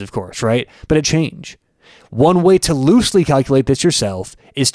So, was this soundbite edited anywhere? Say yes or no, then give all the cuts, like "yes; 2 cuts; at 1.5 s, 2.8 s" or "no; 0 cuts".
yes; 1 cut; at 1.0 s